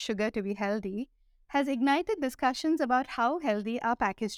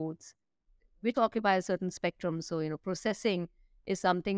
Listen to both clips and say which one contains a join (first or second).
second